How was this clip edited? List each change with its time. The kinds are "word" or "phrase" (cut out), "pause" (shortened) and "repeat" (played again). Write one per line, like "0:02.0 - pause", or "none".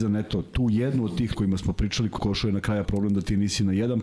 0:01.3 - phrase
0:02.2 - phrase
0:02.8 - word